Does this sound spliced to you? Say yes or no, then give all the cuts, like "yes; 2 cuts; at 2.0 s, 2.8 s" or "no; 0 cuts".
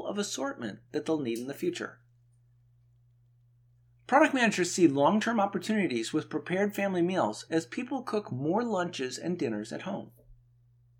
no; 0 cuts